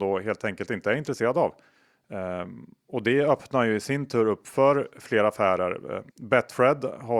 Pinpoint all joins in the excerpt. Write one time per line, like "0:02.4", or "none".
0:06.1